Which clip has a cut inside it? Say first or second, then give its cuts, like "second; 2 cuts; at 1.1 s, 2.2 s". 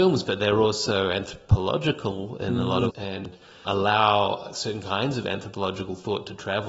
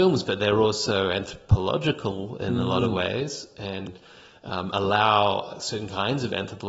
first; 2 cuts; at 2.9 s, 3.7 s